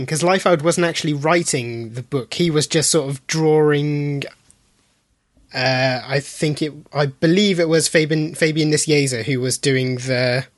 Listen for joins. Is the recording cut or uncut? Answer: uncut